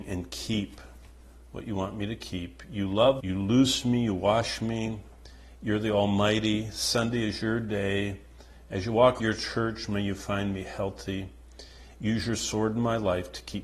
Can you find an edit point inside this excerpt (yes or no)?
yes